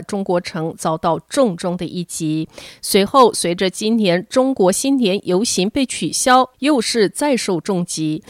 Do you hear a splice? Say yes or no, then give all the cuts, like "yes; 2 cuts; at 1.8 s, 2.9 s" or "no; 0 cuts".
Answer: no; 0 cuts